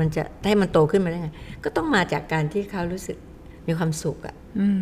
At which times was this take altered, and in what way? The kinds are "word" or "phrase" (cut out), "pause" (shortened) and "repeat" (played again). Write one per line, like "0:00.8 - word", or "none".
0:03.6 - pause